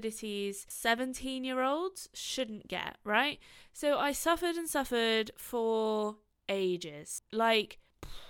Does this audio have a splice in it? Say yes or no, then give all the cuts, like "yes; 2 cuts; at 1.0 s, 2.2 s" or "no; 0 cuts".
no; 0 cuts